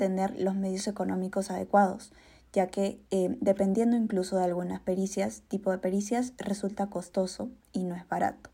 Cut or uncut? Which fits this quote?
uncut